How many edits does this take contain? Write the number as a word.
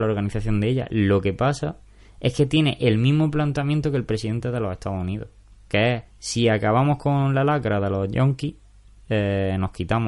one